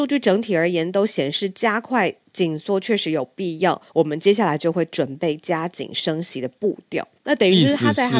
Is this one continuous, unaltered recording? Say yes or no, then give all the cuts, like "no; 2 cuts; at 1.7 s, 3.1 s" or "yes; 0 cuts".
no; 2 cuts; at 3.9 s, 7.2 s